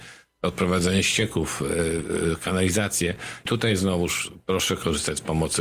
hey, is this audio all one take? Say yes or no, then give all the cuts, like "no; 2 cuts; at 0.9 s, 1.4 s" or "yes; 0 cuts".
no; 1 cut; at 3.5 s